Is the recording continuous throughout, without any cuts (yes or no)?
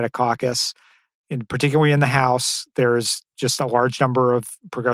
no